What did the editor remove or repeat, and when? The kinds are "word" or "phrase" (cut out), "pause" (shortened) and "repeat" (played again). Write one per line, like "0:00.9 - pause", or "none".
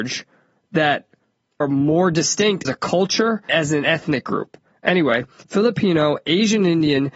0:01.6 - word
0:02.6 - word
0:03.5 - word
0:05.4 - word